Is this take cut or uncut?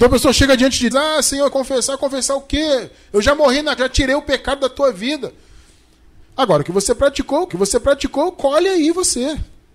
cut